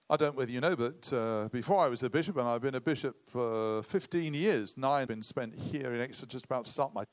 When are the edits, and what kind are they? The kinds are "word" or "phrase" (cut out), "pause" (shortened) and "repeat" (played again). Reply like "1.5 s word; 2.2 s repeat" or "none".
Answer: 5.1 s phrase